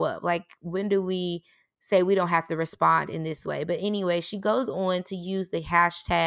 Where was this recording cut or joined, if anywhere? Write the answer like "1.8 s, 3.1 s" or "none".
none